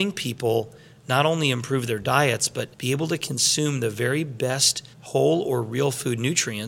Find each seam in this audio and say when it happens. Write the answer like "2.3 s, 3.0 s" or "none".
2.7 s, 4.9 s